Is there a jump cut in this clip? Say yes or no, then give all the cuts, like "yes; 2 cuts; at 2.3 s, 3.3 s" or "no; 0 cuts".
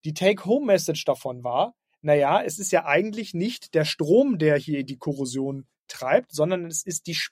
no; 0 cuts